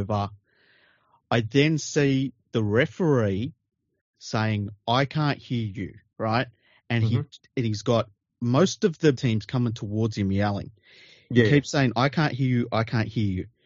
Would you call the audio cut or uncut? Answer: cut